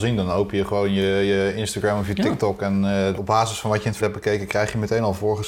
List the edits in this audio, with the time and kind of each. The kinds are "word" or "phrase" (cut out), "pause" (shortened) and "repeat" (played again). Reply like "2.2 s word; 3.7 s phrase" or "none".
3.2 s word; 4.0 s word